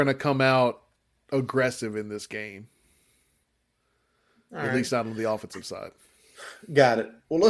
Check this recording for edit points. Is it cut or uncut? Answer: uncut